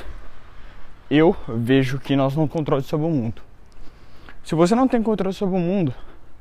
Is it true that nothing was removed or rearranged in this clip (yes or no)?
no